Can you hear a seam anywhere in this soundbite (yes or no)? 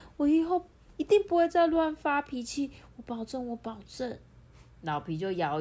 yes